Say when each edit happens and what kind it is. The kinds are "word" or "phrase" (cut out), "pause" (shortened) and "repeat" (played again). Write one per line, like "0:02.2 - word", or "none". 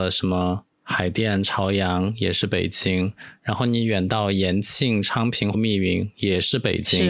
0:05.5 - phrase